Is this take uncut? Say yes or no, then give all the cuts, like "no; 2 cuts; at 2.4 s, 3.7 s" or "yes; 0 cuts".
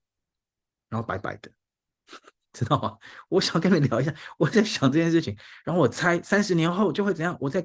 yes; 0 cuts